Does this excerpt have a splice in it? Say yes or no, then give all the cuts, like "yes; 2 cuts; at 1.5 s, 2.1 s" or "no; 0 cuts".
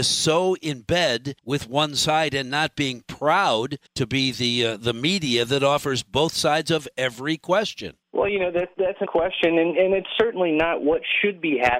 yes; 4 cuts; at 1.4 s, 3.9 s, 8.0 s, 9.1 s